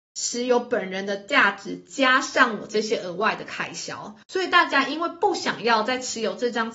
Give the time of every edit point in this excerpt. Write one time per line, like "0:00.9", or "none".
0:04.2